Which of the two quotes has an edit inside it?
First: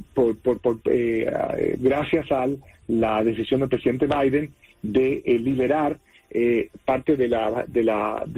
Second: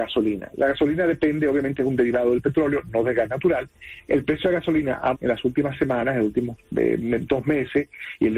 second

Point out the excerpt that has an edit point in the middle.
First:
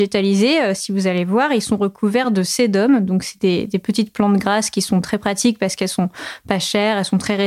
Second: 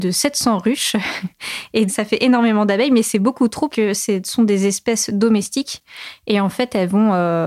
second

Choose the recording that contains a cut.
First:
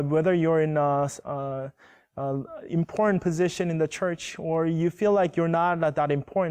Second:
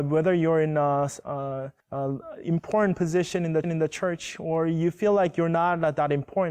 second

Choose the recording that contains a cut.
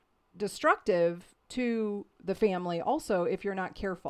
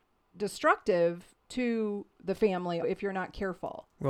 second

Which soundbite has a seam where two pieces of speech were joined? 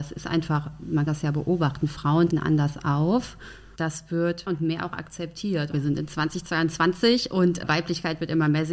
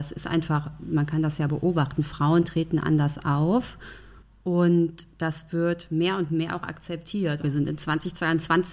first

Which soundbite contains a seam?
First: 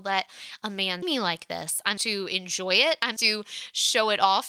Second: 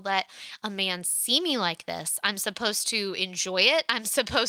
first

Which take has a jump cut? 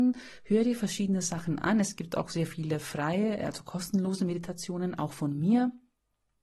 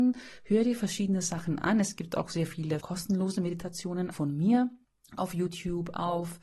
second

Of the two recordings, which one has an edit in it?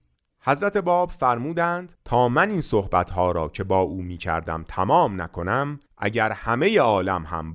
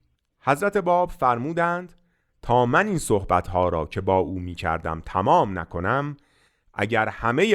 first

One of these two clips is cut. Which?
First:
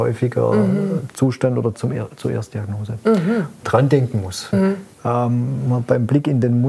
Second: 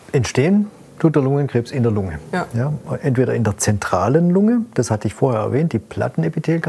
first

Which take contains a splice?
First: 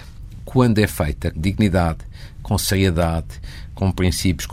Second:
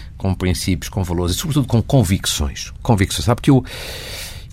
first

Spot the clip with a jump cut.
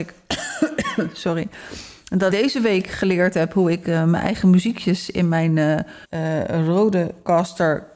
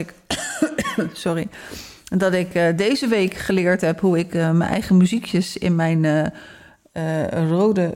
first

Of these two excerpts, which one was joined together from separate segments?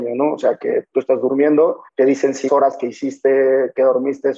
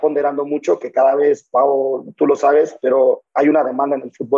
first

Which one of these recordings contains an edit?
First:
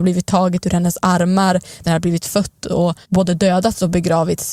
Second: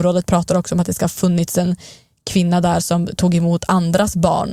first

